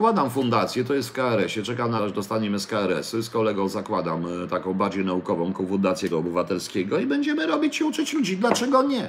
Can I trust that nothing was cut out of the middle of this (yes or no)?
no